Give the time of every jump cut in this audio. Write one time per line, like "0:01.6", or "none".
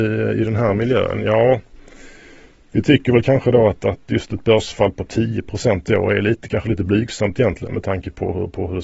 none